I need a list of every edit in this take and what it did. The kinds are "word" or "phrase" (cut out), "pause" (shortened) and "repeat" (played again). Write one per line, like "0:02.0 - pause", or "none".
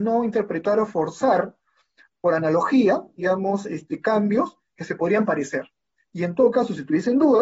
none

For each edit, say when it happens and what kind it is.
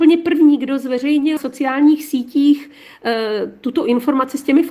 0:01.4 - word

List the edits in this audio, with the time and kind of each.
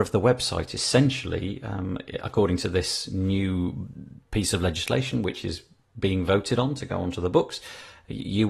none

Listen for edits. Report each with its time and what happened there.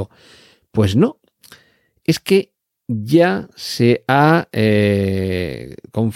none

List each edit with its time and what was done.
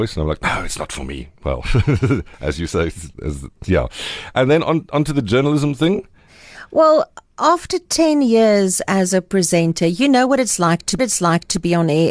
0:03.1 - pause
0:11.0 - repeat

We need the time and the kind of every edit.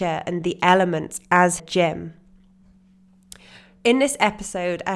0:01.6 - word

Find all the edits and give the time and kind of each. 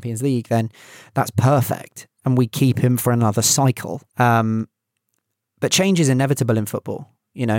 0:04.1 - pause

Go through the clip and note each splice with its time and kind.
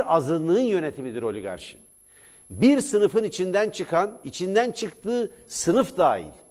none

